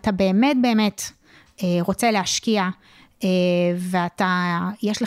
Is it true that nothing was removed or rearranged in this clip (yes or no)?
yes